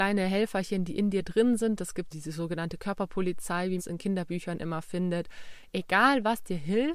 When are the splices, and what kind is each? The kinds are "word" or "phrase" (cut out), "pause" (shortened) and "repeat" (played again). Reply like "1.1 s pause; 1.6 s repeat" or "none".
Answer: 2.1 s word; 3.8 s word